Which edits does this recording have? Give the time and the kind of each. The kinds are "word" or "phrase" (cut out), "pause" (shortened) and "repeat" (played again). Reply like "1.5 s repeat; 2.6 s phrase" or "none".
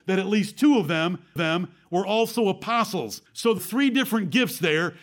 1.4 s repeat; 3.3 s pause; 3.6 s word